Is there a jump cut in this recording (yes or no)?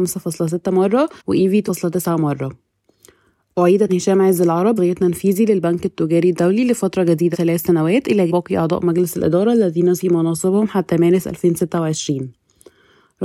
yes